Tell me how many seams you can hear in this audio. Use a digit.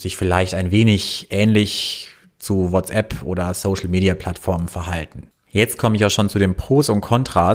0